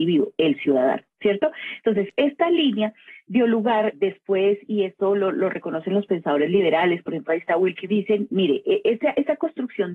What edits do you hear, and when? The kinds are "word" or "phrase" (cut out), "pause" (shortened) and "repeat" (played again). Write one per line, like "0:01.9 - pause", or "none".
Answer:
0:07.9 - phrase